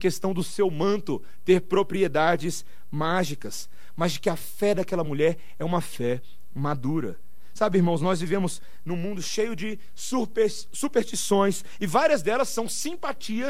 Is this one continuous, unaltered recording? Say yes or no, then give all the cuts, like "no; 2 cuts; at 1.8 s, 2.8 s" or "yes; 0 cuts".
yes; 0 cuts